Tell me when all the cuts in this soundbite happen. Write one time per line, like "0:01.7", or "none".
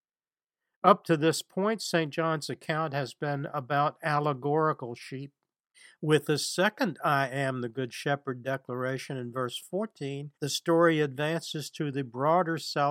0:05.7
0:10.3